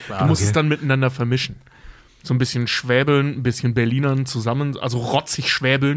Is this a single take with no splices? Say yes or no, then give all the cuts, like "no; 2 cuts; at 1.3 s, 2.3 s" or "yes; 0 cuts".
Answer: yes; 0 cuts